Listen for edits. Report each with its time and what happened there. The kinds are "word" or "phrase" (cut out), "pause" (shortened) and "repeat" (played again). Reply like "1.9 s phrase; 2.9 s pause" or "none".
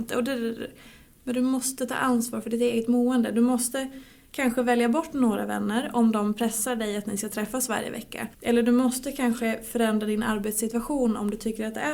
none